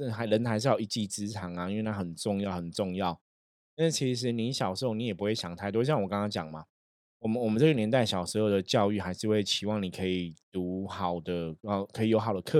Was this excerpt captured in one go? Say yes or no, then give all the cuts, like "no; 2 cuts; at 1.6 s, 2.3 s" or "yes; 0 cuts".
yes; 0 cuts